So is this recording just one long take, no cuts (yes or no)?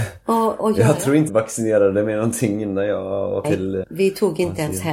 no